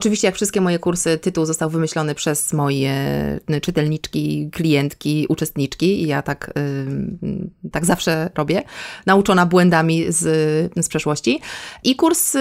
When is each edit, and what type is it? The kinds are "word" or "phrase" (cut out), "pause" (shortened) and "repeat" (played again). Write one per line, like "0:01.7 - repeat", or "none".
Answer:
none